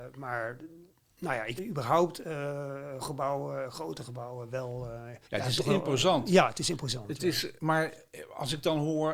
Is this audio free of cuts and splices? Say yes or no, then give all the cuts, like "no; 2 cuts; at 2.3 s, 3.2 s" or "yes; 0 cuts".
no; 4 cuts; at 1.6 s, 3.0 s, 5.2 s, 7.6 s